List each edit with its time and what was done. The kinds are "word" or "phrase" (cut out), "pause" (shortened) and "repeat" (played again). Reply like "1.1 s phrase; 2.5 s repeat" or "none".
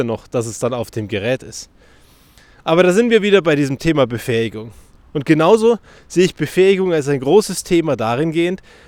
none